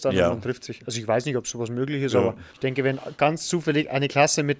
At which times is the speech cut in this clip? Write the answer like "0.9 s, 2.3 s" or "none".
2.5 s